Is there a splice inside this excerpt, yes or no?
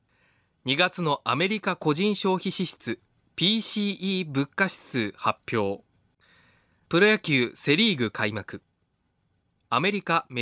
no